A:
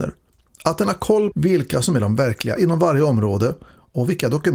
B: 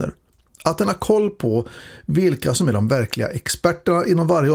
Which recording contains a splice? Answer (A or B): A